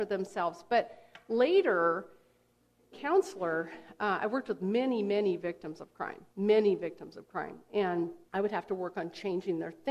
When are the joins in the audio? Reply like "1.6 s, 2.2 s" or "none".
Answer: 2.9 s, 6.3 s, 8.2 s